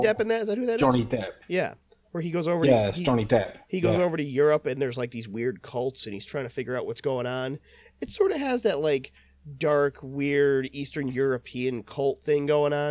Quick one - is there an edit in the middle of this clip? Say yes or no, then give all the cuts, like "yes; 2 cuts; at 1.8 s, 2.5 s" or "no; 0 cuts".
no; 0 cuts